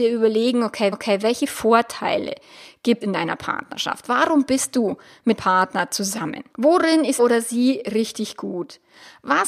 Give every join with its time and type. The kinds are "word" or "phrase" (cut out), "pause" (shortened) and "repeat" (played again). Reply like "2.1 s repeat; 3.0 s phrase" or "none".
0.9 s repeat; 3.0 s word; 5.4 s word; 6.5 s pause; 7.2 s word